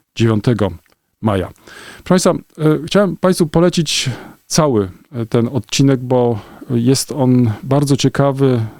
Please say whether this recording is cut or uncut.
uncut